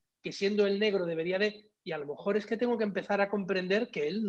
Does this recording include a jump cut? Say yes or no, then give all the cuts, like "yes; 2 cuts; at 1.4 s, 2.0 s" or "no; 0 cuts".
no; 0 cuts